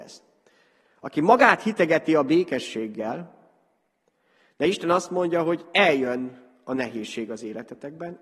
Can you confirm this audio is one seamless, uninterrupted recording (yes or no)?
yes